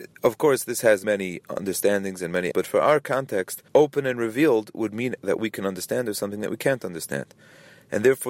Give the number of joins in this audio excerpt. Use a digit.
4